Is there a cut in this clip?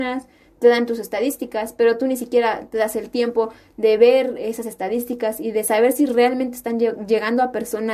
no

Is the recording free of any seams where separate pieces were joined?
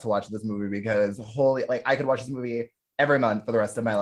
yes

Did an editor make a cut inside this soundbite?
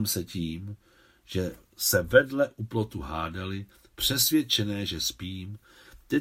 no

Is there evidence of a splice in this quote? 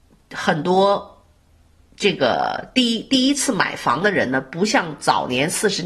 no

